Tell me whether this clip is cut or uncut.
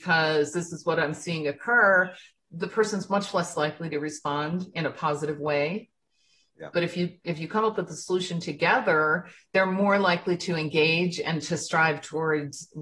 uncut